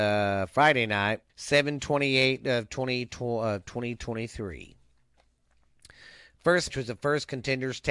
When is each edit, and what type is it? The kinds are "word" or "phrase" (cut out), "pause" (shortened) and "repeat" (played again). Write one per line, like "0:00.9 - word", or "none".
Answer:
0:01.3 - pause
0:06.7 - word